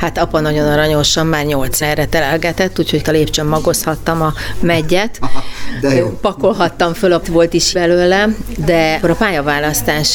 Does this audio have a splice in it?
yes; 5 cuts; at 1.8 s, 3.0 s, 7.2 s, 7.7 s, 9.0 s

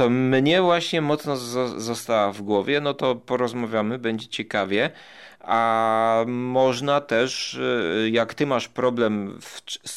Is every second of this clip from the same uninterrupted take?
yes; 0 cuts

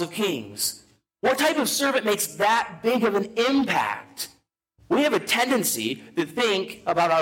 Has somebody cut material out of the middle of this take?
no; 0 cuts

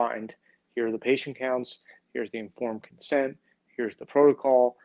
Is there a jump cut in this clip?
no; 0 cuts

